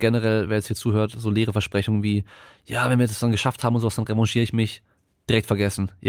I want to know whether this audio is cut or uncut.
uncut